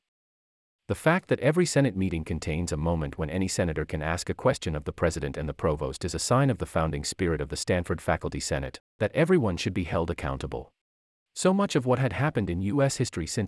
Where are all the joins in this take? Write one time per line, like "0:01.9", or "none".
0:08.9
0:11.1